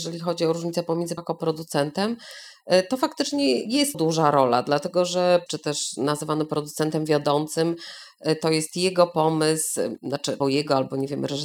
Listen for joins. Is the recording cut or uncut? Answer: cut